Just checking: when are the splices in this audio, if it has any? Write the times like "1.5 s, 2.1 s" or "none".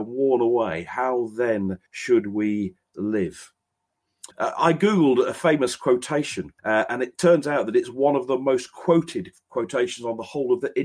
1.9 s, 4.3 s, 6.6 s